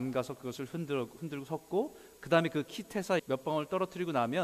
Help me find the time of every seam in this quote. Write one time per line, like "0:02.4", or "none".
0:03.2